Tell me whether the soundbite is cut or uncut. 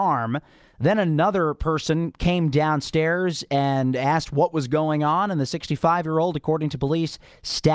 uncut